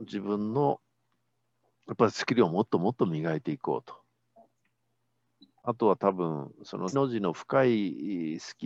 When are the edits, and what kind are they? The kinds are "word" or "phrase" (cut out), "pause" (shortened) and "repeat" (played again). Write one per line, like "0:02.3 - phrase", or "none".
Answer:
0:06.9 - word